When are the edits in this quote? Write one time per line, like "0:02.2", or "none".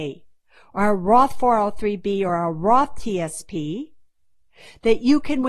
none